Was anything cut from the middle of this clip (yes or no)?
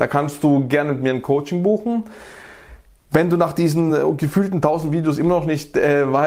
no